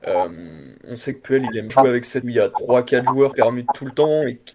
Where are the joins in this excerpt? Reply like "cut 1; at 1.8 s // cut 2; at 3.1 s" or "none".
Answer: cut 1; at 1.7 s // cut 2; at 2.2 s // cut 3; at 3.3 s